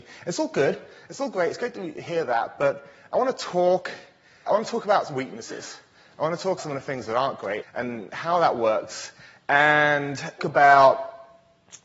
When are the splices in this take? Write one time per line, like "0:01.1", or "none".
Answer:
0:04.5
0:06.6
0:07.6
0:10.4